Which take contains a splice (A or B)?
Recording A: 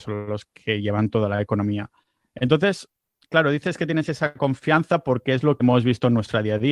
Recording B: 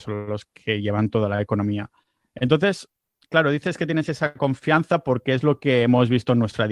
A